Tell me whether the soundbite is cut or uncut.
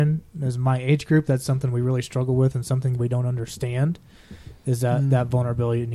uncut